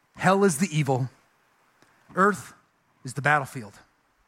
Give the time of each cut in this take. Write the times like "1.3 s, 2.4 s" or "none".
none

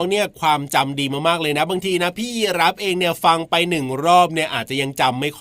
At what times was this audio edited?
none

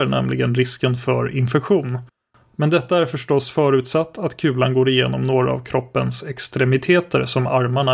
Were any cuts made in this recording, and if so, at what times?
none

